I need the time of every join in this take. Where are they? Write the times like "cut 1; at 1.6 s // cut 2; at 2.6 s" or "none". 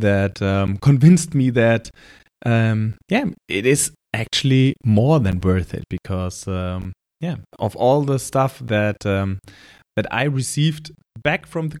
cut 1; at 7.5 s